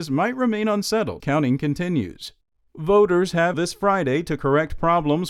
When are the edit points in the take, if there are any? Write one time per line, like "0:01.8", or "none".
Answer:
0:01.2
0:03.5